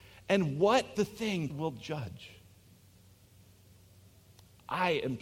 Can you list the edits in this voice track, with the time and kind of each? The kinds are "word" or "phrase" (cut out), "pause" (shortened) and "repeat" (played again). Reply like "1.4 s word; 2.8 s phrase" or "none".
0.9 s word; 1.5 s phrase